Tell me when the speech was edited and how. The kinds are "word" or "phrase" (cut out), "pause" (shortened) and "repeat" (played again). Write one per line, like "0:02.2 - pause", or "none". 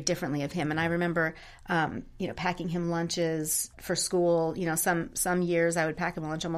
0:03.7 - pause